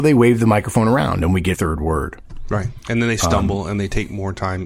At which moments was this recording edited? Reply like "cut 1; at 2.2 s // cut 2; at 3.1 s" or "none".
cut 1; at 1.5 s